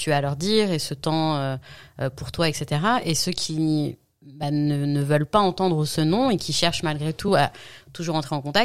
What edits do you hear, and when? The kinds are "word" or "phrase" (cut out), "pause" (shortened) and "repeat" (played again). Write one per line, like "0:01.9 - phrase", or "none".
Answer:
none